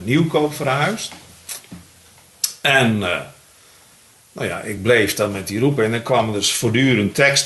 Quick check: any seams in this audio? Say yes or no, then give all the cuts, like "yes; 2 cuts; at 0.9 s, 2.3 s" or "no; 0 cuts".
no; 0 cuts